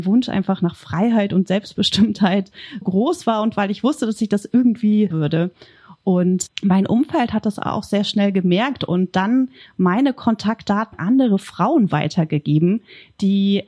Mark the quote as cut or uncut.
cut